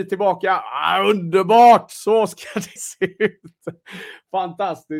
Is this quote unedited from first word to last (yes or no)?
no